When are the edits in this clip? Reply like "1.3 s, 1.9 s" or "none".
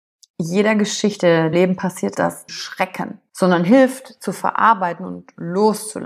1.5 s, 2.1 s, 2.5 s, 3.3 s